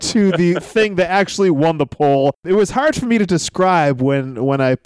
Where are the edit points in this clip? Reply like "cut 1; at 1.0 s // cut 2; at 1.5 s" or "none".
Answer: none